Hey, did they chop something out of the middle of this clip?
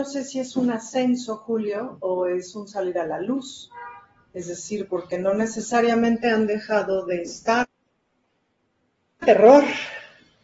no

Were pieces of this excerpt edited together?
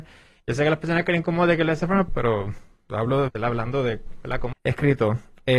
yes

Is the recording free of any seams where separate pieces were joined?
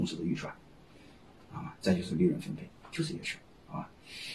yes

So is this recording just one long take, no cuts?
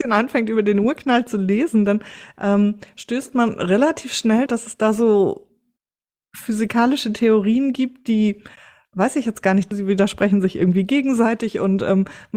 no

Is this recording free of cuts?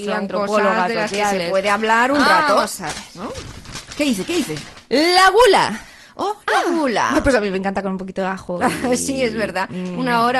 yes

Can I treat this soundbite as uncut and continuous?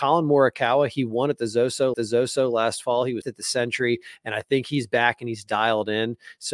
no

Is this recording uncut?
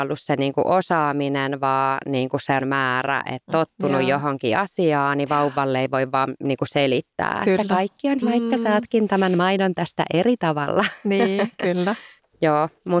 no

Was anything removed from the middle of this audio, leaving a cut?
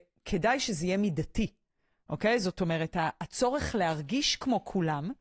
no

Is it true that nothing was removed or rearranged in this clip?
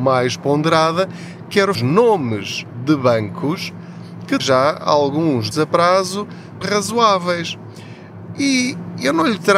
no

